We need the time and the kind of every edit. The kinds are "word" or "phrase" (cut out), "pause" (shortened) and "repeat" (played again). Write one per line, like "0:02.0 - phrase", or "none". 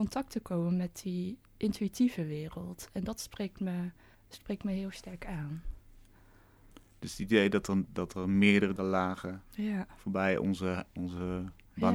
0:01.5 - pause
0:04.1 - pause
0:08.8 - phrase